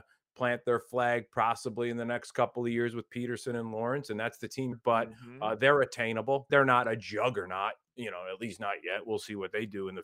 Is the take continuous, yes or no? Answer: no